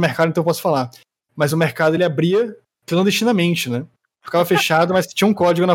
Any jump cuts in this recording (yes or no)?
no